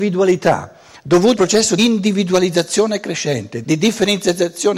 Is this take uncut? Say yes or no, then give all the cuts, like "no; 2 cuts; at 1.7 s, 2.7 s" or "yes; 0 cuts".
no; 3 cuts; at 1.4 s, 1.8 s, 3.6 s